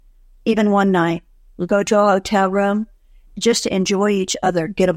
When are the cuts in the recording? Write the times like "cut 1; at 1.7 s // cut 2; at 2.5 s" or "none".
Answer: none